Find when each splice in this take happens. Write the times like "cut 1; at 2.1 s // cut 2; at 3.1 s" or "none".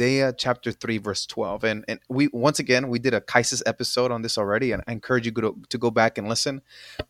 none